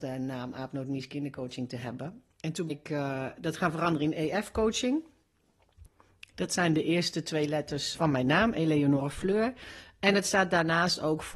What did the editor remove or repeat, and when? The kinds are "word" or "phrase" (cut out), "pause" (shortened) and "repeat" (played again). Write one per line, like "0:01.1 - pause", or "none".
0:02.7 - word
0:07.9 - word